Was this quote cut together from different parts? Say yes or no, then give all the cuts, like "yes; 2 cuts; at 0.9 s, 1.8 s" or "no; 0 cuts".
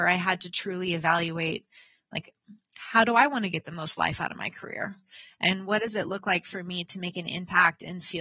no; 0 cuts